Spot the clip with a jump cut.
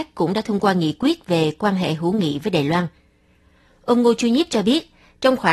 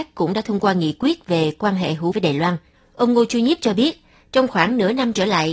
second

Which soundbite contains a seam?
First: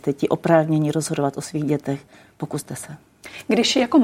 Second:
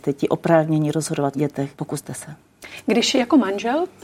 second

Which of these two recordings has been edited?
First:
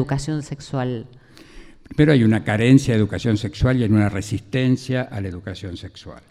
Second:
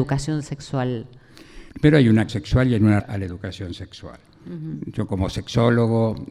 second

